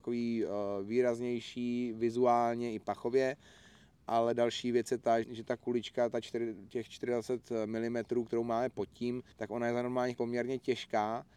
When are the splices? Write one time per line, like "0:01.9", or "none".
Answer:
0:05.2
0:09.3
0:10.1